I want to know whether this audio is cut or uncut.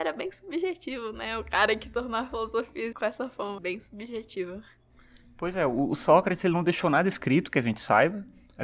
cut